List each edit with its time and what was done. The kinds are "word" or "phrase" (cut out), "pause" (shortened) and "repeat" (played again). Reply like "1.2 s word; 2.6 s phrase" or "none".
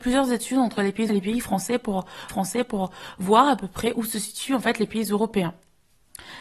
1.1 s word; 2.3 s repeat

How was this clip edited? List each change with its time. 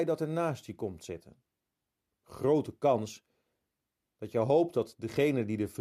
1.9 s pause

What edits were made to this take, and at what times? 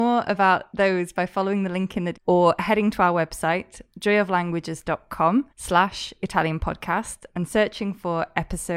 2.1 s word; 5.5 s pause

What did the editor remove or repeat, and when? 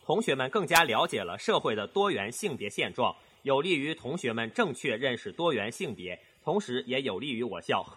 none

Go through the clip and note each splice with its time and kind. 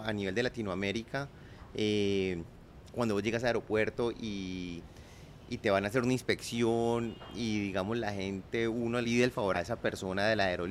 9.0 s word; 9.5 s word

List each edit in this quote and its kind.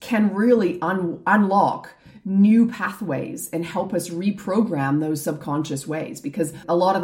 none

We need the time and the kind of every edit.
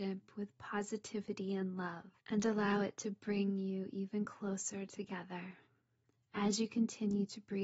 2.2 s pause

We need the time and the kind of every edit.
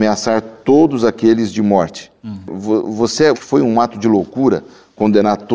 3.3 s phrase

